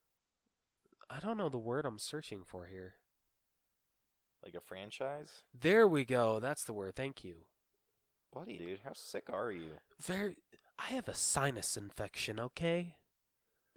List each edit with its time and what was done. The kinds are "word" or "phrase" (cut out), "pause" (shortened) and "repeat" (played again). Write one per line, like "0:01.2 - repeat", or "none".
0:08.5 - word